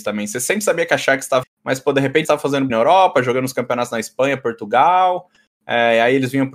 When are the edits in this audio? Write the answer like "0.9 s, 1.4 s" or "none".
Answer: 1.4 s, 2.2 s, 2.7 s